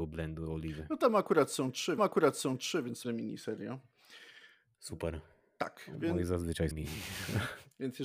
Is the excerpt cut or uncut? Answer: cut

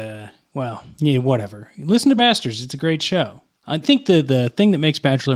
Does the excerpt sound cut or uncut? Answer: cut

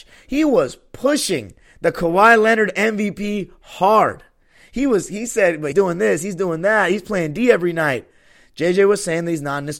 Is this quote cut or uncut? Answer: cut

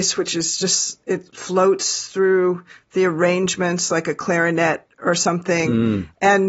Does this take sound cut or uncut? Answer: uncut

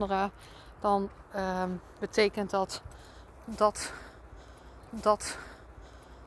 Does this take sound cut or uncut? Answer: cut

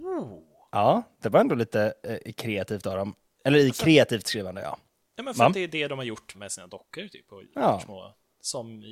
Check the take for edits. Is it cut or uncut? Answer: cut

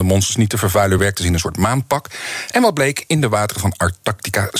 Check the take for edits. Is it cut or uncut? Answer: uncut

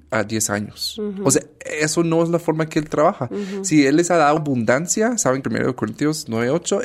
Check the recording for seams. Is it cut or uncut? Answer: cut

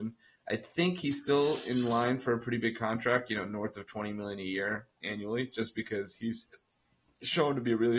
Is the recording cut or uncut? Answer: uncut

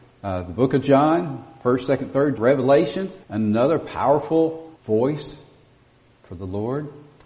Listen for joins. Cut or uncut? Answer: cut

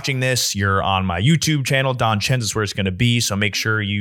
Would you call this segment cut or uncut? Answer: uncut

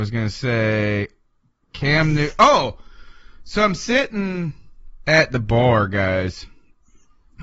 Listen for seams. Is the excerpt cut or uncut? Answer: uncut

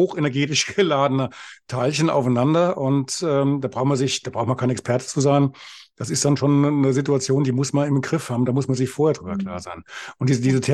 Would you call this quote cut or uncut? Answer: uncut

